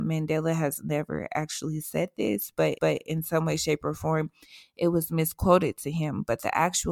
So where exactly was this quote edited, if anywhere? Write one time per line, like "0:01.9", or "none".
0:02.8